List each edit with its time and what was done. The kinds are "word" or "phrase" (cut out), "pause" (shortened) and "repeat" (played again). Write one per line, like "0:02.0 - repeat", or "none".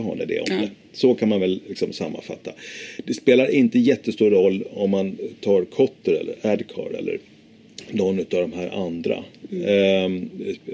none